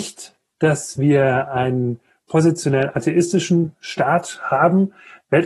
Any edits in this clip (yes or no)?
no